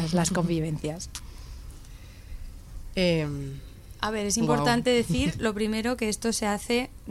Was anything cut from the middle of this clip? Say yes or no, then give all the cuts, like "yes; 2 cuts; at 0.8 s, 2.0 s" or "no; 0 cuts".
no; 0 cuts